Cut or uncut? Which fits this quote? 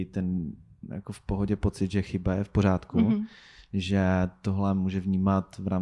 uncut